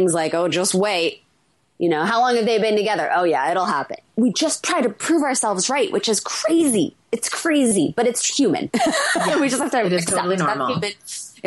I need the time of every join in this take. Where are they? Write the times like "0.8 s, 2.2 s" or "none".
none